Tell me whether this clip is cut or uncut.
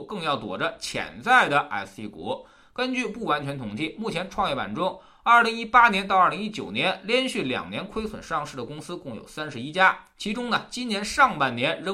uncut